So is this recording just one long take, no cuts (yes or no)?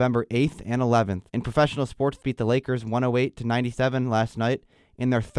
no